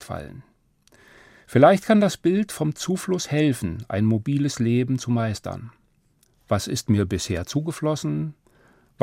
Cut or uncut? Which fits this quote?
uncut